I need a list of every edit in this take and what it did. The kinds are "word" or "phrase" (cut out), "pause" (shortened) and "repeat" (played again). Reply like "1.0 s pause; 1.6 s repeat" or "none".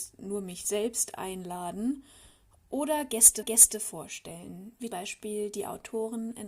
3.4 s repeat; 4.9 s word